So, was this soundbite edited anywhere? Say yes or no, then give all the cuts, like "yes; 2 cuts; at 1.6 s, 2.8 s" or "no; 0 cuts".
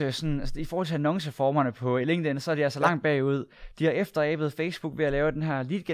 no; 0 cuts